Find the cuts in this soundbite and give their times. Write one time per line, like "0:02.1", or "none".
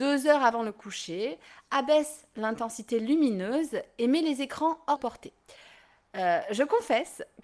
0:05.0